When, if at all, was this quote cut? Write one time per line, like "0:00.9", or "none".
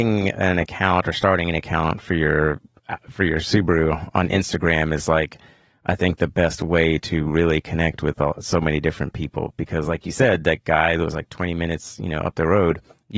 none